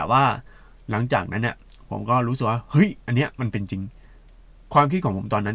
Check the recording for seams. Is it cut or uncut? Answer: uncut